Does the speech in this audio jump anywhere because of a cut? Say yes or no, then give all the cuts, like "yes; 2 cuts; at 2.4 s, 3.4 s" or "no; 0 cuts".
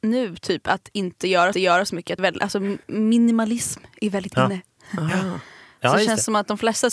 yes; 3 cuts; at 1.5 s, 2.2 s, 2.8 s